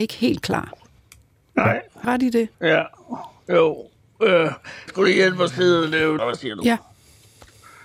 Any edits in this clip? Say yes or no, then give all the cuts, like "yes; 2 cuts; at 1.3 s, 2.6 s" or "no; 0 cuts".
yes; 4 cuts; at 2.0 s, 2.5 s, 4.9 s, 6.2 s